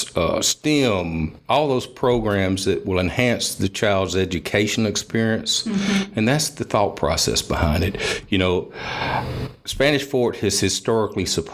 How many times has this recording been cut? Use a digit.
0